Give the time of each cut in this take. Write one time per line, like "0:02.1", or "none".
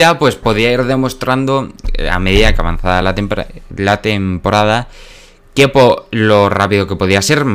none